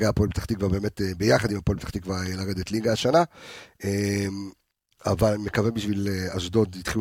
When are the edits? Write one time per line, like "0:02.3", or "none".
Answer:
none